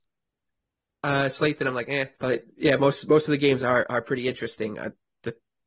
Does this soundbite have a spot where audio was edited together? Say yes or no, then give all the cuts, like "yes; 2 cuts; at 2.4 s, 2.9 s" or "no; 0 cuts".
yes; 1 cut; at 2.1 s